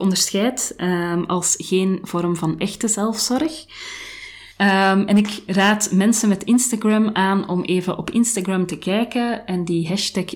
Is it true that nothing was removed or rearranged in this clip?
no; 1 cut; at 4.5 s

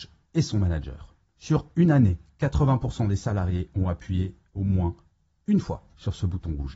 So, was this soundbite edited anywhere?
no; 0 cuts

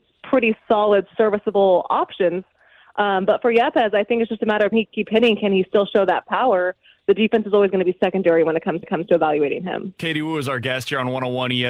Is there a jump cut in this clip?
yes; 2 cuts; at 4.7 s, 8.8 s

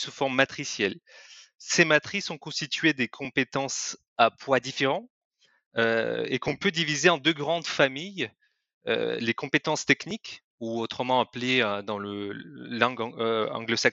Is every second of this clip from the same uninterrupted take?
yes; 0 cuts

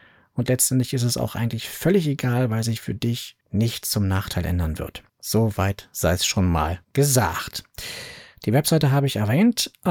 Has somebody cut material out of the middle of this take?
yes; 3 cuts; at 3.4 s, 5.1 s, 6.8 s

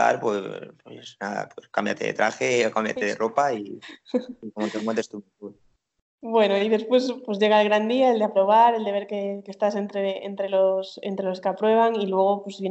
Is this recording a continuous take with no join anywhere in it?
yes; 0 cuts

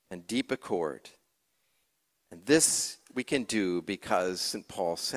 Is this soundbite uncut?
yes; 0 cuts

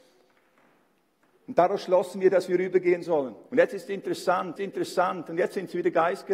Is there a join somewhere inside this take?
yes; 2 cuts; at 3.5 s, 4.6 s

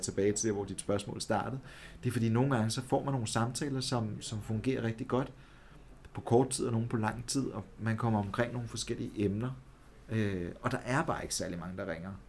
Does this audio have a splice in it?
no; 0 cuts

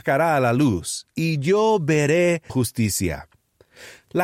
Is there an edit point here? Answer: yes; 1 cut; at 2.5 s

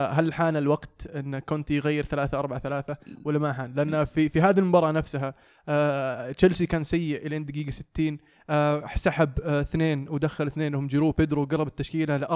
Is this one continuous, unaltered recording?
yes; 0 cuts

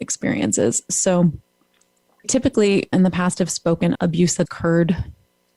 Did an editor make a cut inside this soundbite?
yes; 4 cuts; at 2.2 s, 2.9 s, 3.9 s, 4.4 s

